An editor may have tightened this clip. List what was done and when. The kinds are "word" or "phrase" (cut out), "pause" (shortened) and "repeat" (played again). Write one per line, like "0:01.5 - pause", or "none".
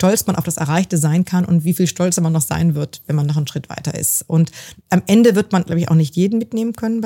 0:04.8 - pause